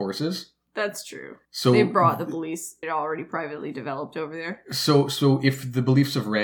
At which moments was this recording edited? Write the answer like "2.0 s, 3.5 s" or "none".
1.4 s, 2.8 s